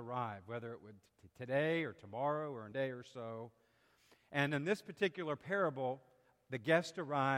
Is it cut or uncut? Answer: cut